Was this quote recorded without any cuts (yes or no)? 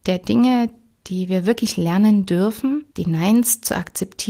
no